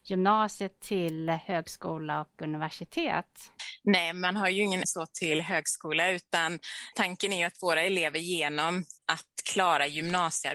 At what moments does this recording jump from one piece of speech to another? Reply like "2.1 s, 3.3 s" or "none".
4.8 s, 6.9 s, 9.0 s